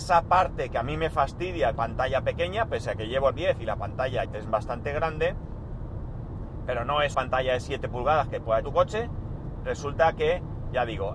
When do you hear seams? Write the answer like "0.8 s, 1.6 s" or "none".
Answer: 1.8 s, 3.3 s, 4.3 s, 7.1 s, 8.6 s